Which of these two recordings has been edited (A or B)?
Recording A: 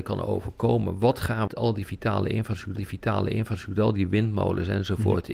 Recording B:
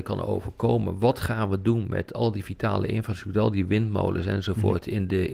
A